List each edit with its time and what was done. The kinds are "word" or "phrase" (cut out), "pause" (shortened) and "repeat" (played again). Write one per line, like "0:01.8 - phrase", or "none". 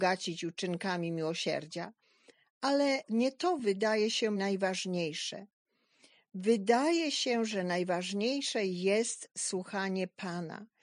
none